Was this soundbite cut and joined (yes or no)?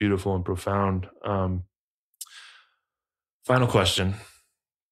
no